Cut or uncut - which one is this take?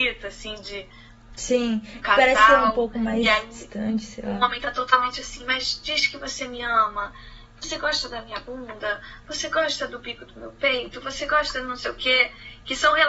uncut